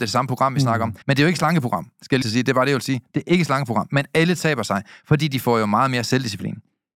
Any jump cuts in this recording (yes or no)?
yes